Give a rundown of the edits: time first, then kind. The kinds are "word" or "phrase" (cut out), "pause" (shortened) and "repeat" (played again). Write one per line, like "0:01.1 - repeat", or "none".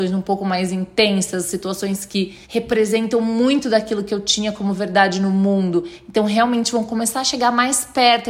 0:02.4 - pause